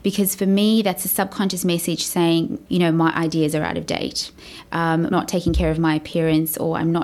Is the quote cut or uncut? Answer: cut